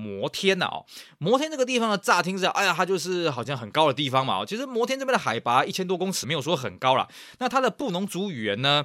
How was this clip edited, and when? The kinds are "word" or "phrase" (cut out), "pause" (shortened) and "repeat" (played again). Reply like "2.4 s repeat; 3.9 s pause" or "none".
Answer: 6.2 s word

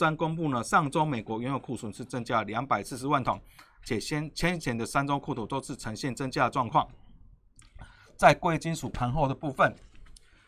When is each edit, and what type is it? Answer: none

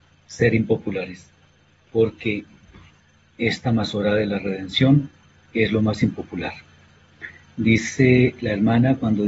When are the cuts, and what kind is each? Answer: none

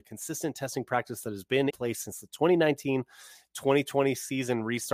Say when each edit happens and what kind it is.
1.7 s word

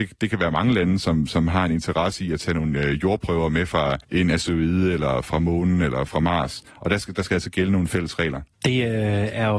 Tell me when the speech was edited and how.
4.0 s pause; 6.7 s pause; 8.5 s pause

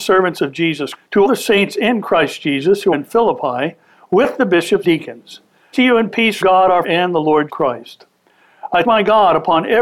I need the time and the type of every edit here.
0.9 s word; 1.3 s word; 2.9 s word; 4.8 s word; 5.7 s word; 6.4 s word; 6.8 s word; 7.5 s word; 8.8 s word

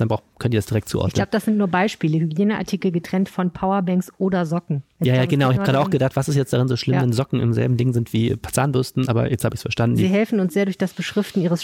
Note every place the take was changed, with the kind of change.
none

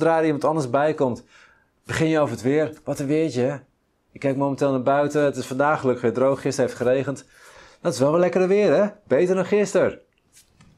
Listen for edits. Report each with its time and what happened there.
none

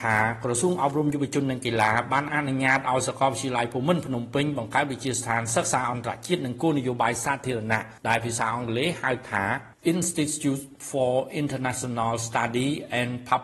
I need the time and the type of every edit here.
8.0 s pause; 9.7 s pause

